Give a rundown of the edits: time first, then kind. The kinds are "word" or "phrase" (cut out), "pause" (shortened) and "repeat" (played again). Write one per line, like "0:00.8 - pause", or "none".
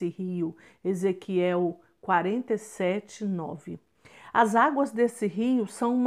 none